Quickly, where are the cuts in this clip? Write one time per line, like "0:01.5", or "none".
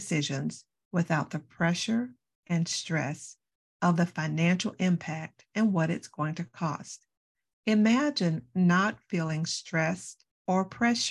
none